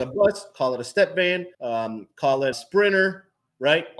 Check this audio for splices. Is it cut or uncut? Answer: cut